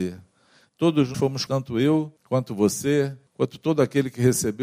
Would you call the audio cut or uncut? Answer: cut